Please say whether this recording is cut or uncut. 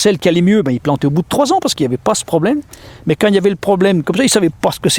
uncut